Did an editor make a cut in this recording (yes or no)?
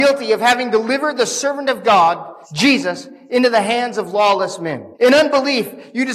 yes